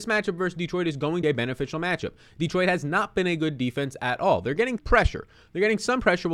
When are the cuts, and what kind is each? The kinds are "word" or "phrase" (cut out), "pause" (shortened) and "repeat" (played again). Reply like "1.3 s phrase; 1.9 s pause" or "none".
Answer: 1.2 s phrase; 4.8 s word